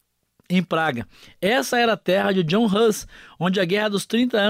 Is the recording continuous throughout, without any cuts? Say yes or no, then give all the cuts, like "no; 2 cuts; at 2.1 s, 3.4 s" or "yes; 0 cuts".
yes; 0 cuts